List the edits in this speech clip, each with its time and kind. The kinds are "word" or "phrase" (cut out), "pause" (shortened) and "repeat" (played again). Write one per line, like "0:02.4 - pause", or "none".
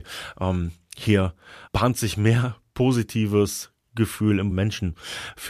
0:01.7 - word
0:04.5 - phrase